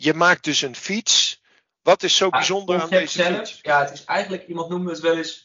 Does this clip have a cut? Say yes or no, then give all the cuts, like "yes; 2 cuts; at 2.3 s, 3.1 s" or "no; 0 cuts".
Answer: no; 0 cuts